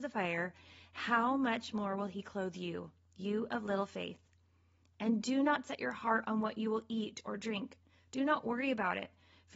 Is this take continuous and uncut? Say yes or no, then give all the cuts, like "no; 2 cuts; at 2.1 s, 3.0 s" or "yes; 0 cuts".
yes; 0 cuts